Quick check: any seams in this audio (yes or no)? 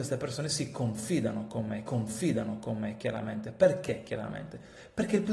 yes